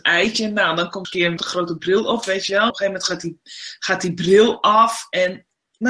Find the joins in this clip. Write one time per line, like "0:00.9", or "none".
0:01.0
0:01.4
0:02.7